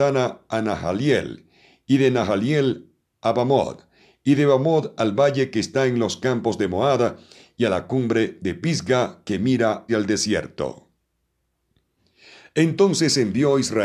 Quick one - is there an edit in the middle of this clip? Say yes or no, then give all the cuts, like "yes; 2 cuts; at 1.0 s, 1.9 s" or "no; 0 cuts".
yes; 1 cut; at 9.9 s